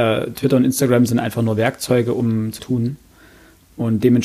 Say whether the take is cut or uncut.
cut